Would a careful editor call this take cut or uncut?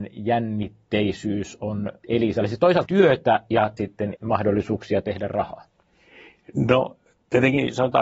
cut